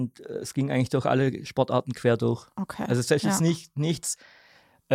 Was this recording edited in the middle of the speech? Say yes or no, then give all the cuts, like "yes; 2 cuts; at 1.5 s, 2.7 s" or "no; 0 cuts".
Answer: no; 0 cuts